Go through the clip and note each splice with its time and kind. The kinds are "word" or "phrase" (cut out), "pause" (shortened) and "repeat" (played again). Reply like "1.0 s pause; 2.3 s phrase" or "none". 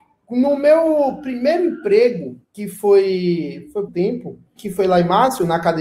2.4 s pause; 3.9 s word; 4.6 s word